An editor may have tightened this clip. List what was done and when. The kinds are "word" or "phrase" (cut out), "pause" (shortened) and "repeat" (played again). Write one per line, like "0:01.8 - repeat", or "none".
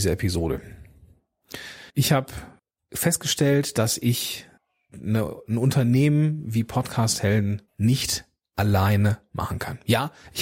0:01.9 - pause
0:02.6 - pause
0:04.6 - pause
0:07.7 - pause